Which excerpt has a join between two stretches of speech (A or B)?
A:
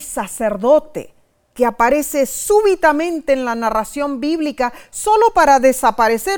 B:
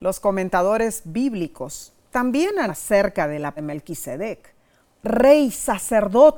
B